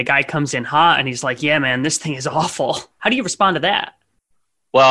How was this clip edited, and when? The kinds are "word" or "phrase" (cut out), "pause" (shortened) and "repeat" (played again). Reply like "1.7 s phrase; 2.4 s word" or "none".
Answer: 2.9 s pause